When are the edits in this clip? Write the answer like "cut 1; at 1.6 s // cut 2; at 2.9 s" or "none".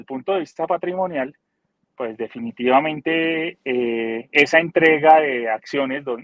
none